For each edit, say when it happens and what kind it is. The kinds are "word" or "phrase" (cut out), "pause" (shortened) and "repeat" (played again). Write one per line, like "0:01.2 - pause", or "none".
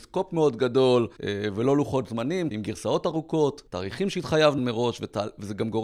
0:01.2 - pause
0:02.5 - phrase
0:03.7 - pause
0:04.6 - phrase